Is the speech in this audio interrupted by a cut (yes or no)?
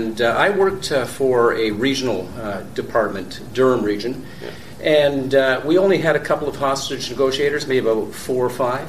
no